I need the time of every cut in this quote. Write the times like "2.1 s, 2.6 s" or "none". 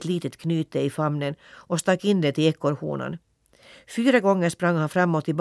none